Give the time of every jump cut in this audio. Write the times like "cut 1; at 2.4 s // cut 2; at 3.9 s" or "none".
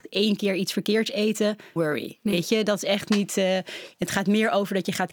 cut 1; at 1.8 s

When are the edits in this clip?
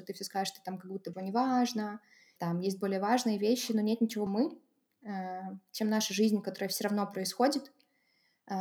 cut 1; at 1.1 s // cut 2; at 2.4 s // cut 3; at 4.3 s

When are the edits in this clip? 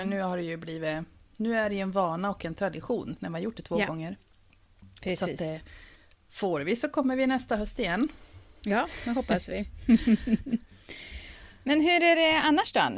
cut 1; at 6.0 s

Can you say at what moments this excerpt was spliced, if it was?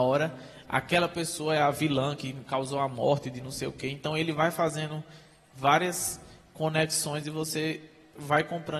none

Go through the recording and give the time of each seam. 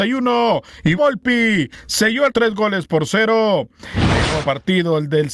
cut 1; at 1.0 s // cut 2; at 2.3 s // cut 3; at 4.4 s

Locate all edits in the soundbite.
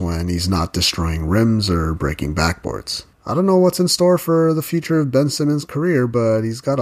cut 1; at 3.1 s

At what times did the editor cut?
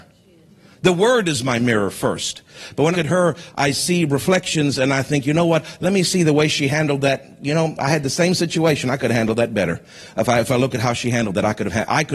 cut 1; at 2.9 s

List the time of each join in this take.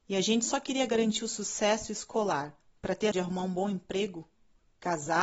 cut 1; at 2.6 s // cut 2; at 3.1 s

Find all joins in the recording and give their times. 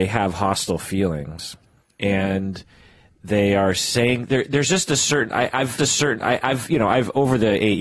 cut 1; at 5.8 s

